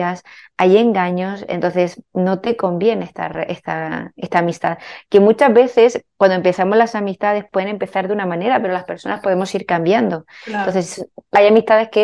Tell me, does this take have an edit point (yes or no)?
no